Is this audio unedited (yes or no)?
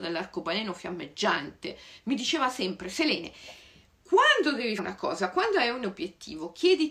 no